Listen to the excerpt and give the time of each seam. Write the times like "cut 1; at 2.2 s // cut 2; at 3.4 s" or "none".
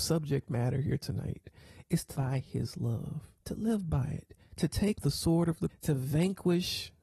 cut 1; at 2.2 s // cut 2; at 3.4 s // cut 3; at 4.9 s // cut 4; at 5.7 s

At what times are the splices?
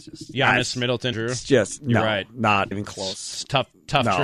cut 1; at 1.1 s // cut 2; at 2.7 s

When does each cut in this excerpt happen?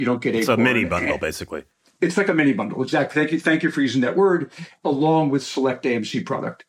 none

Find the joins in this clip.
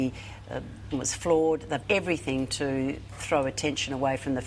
cut 1; at 0.9 s // cut 2; at 1.8 s

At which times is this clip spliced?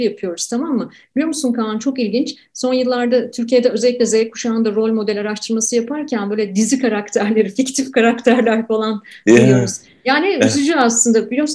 none

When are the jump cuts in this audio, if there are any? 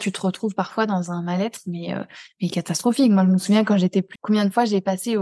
cut 1; at 4.2 s

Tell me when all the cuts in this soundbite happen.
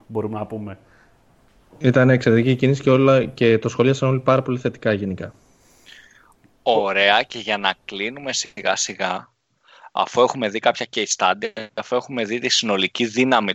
none

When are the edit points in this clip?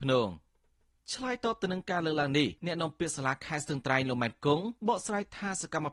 cut 1; at 2.6 s // cut 2; at 4.8 s

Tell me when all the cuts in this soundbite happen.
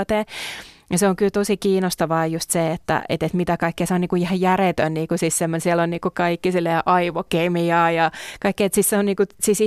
none

